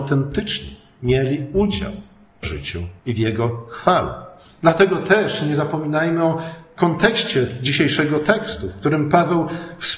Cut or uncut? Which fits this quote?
cut